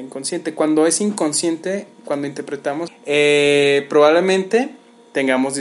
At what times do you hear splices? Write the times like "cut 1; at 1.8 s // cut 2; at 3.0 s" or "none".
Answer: cut 1; at 2.9 s

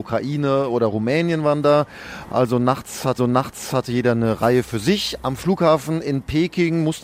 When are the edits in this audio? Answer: cut 1; at 3.2 s

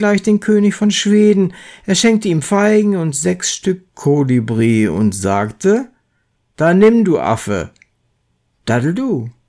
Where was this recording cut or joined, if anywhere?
none

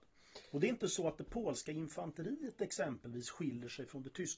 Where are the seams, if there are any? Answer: none

